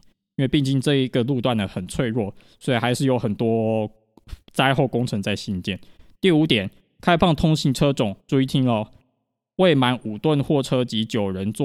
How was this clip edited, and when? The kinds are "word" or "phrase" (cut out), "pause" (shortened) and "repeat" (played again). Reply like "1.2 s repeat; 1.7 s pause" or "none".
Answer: 8.2 s pause